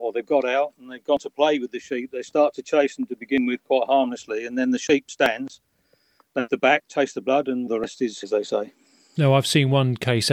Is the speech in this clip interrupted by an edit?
yes; 3 cuts; at 6.5 s, 7.7 s, 8.2 s

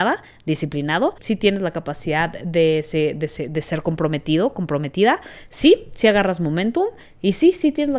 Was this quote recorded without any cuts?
no; 1 cut; at 1.2 s

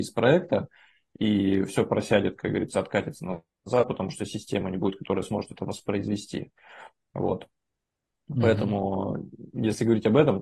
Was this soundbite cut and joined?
no; 0 cuts

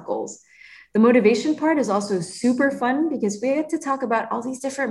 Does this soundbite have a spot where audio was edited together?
no; 0 cuts

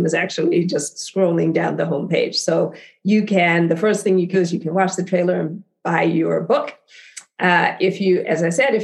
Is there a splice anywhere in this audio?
yes; 1 cut; at 4.3 s

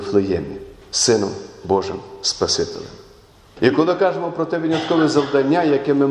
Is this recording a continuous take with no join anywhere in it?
yes; 0 cuts

